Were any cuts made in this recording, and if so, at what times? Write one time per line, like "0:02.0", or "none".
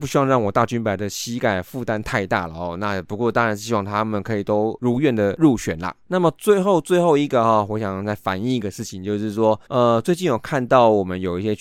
0:06.0
0:09.7

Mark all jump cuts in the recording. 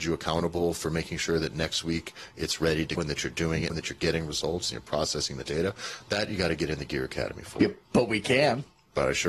0:03.0
0:03.7

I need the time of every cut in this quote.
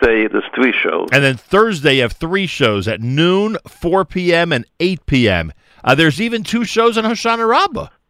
none

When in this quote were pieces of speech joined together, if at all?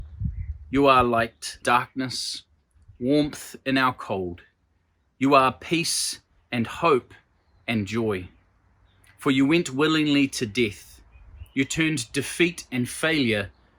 0:01.6

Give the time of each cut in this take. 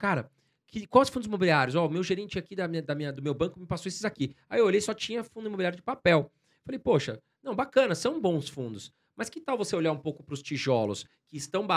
none

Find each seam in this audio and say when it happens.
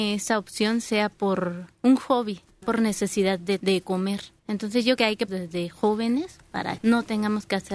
0:01.7
0:02.6
0:03.6
0:04.4
0:05.0
0:05.3
0:06.8

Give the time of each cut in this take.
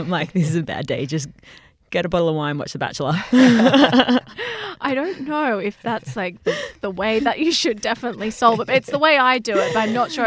none

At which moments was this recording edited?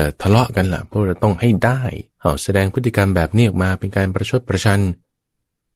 0:02.1

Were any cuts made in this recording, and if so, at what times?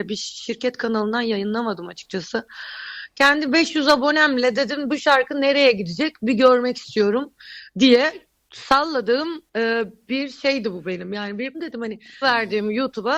0:09.5
0:11.5
0:12.2

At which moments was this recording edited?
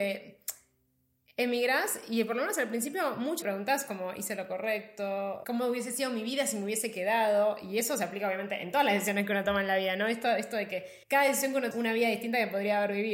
0:03.4
0:05.4
0:11.0
0:11.7

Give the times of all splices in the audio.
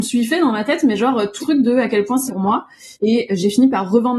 0:01.4
0:02.3
0:02.9

